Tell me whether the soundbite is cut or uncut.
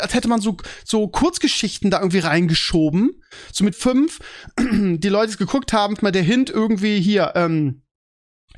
cut